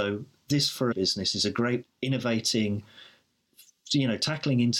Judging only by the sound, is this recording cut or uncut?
cut